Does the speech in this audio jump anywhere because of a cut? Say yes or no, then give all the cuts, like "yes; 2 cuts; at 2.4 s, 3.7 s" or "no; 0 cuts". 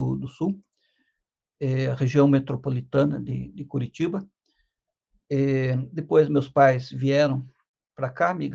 no; 0 cuts